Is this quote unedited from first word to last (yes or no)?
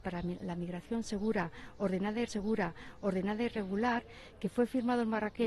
no